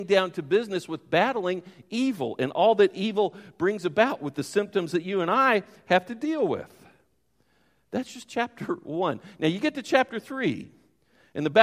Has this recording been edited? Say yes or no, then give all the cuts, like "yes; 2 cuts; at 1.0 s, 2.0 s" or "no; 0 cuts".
no; 0 cuts